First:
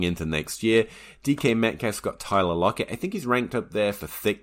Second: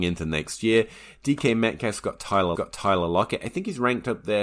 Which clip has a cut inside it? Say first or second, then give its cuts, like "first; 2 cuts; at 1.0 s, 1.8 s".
second; 1 cut; at 2.5 s